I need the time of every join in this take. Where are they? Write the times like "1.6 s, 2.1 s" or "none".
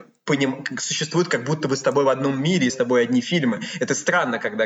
2.7 s

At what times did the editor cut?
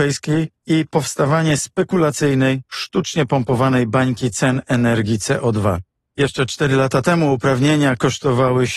none

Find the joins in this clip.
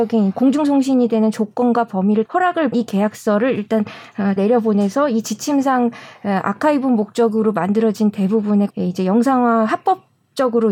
2.3 s, 2.7 s, 4.4 s, 8.7 s

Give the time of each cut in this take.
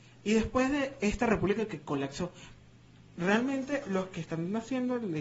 none

